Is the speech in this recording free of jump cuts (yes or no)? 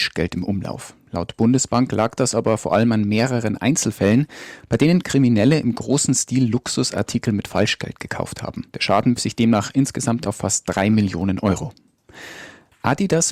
no